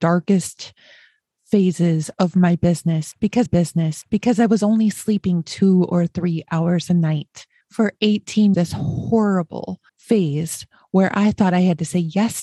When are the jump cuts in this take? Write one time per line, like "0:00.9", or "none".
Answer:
0:03.5
0:07.6
0:08.5
0:09.9